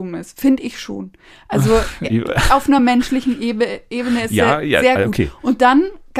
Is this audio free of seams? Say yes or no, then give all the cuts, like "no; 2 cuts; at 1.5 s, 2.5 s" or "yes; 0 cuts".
yes; 0 cuts